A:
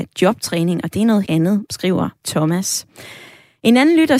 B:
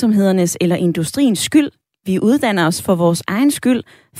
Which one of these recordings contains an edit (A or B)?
A